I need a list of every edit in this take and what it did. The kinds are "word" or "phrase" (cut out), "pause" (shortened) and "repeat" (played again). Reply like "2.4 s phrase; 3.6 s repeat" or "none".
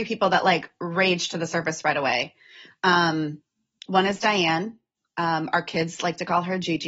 none

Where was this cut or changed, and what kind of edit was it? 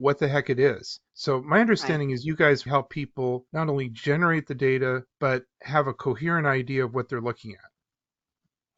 1.1 s pause; 2.7 s word; 3.5 s pause; 5.1 s pause

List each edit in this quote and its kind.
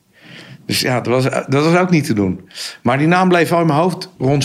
none

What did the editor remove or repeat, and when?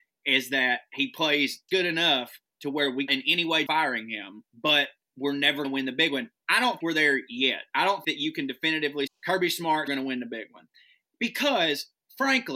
1.7 s word; 3.1 s word; 3.7 s word; 5.6 s word; 6.8 s word; 8.0 s word; 9.1 s word; 9.9 s word

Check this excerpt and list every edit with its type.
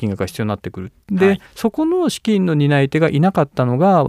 1.5 s pause

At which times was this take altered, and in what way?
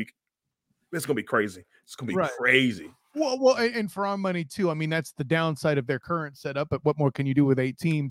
none

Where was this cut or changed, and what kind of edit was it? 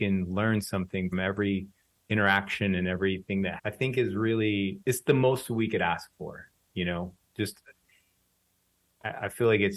1.1 s word; 3.6 s word; 4.8 s word; 7.3 s word

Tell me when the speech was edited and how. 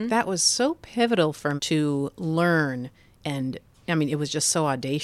1.6 s word

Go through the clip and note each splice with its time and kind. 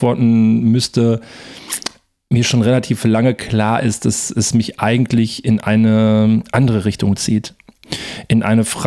none

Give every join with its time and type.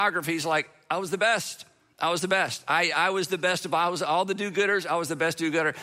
none

